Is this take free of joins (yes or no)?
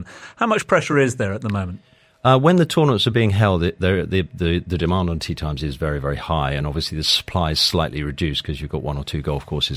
yes